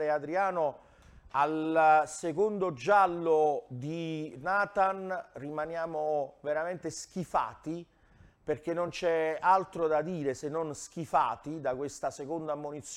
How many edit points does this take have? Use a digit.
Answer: 0